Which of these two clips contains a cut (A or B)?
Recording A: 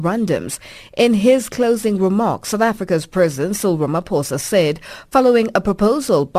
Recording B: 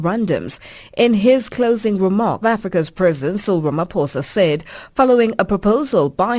B